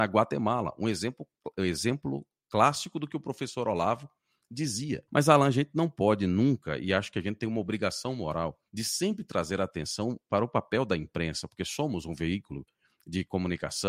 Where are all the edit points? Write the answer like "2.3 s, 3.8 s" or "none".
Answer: 5.1 s, 8.7 s